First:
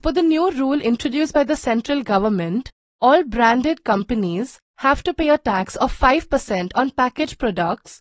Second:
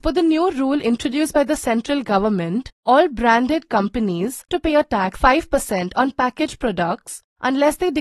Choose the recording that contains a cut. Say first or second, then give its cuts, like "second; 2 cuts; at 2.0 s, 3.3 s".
second; 3 cuts; at 2.7 s, 4.5 s, 5.1 s